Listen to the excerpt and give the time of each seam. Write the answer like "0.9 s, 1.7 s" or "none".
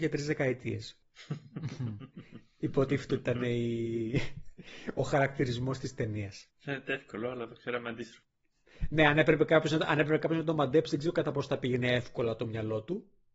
6.5 s